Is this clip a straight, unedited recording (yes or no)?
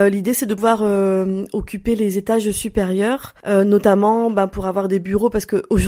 yes